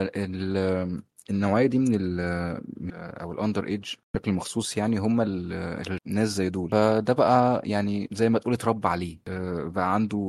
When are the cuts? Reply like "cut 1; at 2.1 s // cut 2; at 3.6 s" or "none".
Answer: cut 1; at 2.9 s // cut 2; at 6.0 s